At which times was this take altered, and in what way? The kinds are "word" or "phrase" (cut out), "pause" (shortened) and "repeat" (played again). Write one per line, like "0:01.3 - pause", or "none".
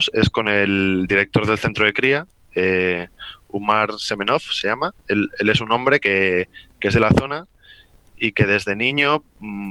none